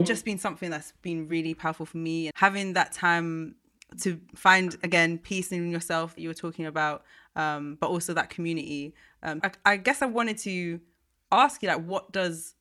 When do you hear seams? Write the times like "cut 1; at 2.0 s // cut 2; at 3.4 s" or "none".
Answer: cut 1; at 2.3 s // cut 2; at 6.2 s // cut 3; at 9.4 s